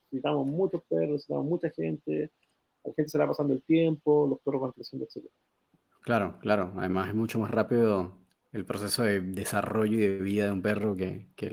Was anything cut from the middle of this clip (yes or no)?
no